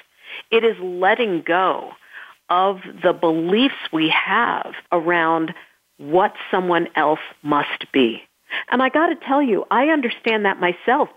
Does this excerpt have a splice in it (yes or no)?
yes